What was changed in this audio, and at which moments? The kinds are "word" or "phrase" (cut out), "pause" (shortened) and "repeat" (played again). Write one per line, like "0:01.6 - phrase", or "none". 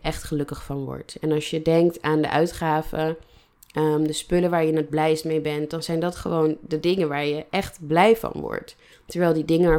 none